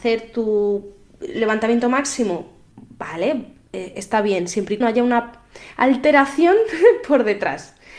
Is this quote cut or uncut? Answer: cut